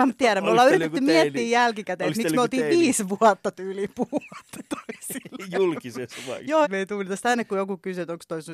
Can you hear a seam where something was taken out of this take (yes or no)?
yes